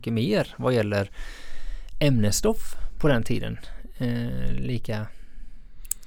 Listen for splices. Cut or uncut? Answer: uncut